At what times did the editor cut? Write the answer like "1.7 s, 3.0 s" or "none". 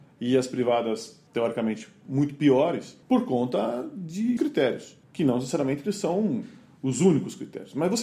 1.3 s, 3.0 s, 4.4 s, 5.0 s